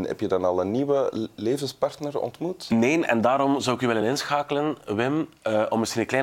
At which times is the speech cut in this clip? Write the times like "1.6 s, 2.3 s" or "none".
none